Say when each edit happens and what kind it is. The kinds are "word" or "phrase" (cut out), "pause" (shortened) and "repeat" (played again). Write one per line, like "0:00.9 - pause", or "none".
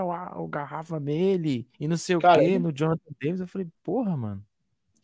0:01.7 - pause